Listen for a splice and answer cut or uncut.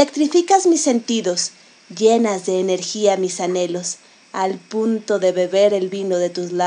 uncut